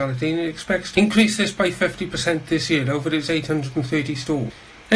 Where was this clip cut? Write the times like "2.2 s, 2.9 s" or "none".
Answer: none